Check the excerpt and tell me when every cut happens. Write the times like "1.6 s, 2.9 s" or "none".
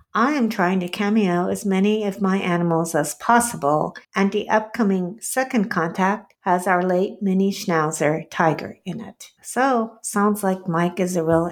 4.0 s, 6.3 s, 9.4 s